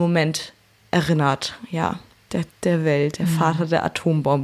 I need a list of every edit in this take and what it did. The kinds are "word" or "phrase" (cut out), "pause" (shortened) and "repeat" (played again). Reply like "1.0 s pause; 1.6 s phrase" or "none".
2.5 s word